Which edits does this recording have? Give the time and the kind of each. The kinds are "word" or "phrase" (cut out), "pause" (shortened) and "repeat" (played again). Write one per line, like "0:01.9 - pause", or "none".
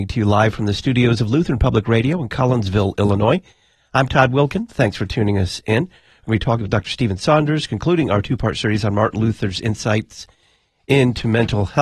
none

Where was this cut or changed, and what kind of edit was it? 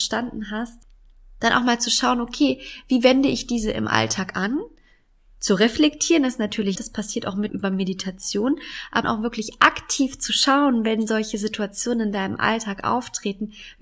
0:06.7 - word
0:07.5 - word
0:09.0 - word

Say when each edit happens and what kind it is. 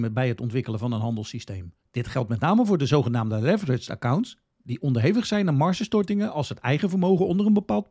0:01.8 - pause

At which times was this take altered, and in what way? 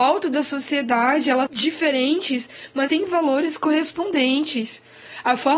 0:01.5 - word
0:02.9 - word

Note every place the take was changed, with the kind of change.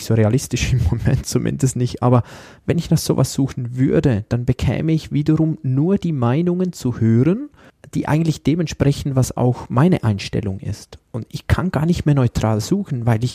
none

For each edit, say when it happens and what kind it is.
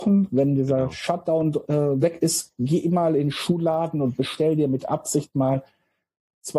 none

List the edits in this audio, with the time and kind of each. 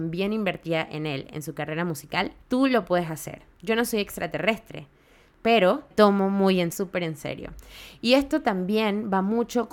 0:02.4 - pause
0:05.9 - word
0:06.7 - phrase

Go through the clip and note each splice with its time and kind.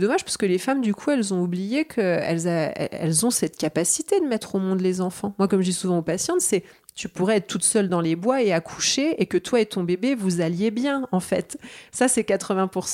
none

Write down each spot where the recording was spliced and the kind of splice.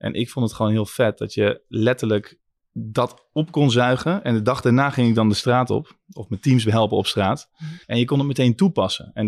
0:02.6 - pause
0:06.0 - pause
0:07.8 - pause

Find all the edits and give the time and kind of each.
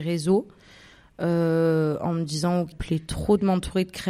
0:02.7 - phrase

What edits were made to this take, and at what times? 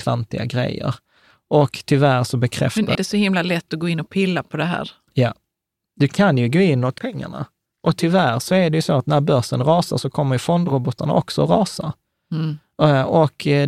0:02.9 - word
0:07.0 - word

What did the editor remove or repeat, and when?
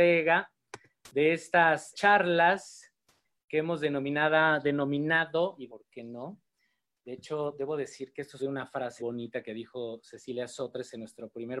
0:01.9 - word
0:05.7 - word
0:08.4 - word
0:09.0 - word

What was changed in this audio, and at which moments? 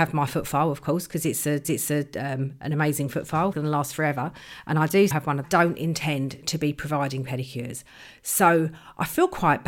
0:01.6 - repeat
0:03.5 - phrase
0:05.1 - word
0:05.4 - phrase

